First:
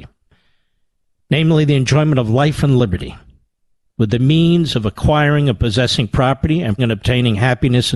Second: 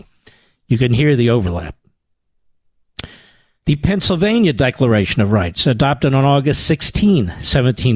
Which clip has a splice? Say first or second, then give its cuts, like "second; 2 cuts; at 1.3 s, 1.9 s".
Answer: first; 1 cut; at 6.8 s